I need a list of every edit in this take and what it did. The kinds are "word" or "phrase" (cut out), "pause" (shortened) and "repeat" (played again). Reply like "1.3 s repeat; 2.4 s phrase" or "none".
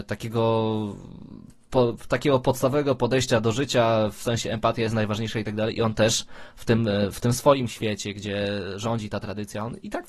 none